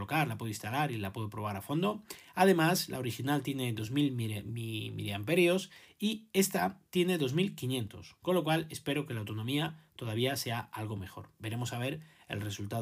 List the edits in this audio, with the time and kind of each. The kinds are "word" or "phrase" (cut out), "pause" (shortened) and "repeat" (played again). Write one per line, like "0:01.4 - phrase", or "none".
none